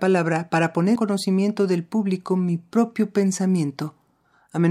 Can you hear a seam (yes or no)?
yes